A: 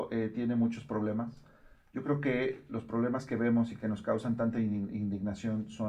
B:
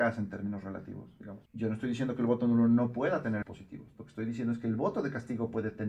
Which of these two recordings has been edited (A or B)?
B